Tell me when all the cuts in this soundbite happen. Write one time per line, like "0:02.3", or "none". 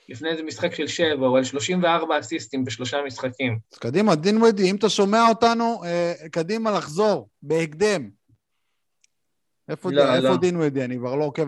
0:03.6
0:07.3

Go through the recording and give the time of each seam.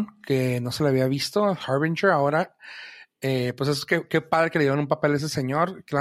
none

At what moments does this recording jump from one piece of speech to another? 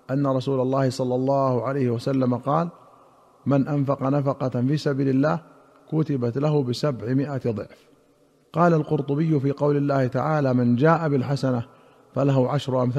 none

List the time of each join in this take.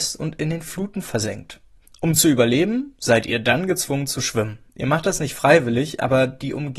0:01.8
0:04.7

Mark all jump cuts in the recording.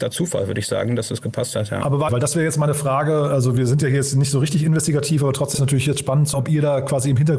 0:02.1
0:05.5
0:06.3

